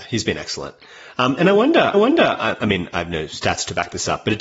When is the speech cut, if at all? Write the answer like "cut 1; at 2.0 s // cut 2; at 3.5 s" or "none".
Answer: cut 1; at 1.9 s